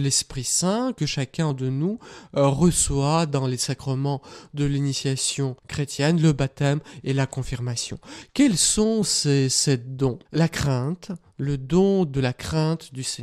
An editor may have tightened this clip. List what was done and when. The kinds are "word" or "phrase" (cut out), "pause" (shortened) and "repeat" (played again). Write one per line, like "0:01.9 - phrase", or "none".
0:05.6 - pause
0:10.2 - pause